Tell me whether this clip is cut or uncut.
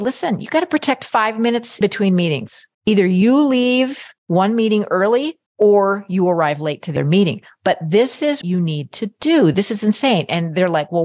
cut